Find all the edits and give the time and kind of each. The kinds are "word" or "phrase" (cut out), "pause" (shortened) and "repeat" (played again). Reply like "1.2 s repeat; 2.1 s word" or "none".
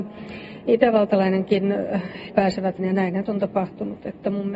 2.3 s word; 2.8 s word; 3.3 s word